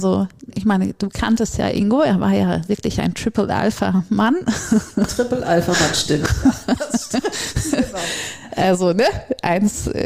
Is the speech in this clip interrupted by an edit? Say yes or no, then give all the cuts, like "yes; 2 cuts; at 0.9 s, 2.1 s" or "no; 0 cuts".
no; 0 cuts